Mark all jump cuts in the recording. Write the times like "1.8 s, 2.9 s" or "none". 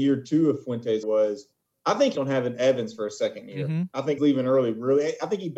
1.0 s, 2.1 s, 4.2 s